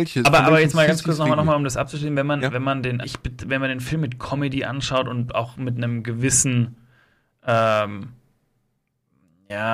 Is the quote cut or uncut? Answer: cut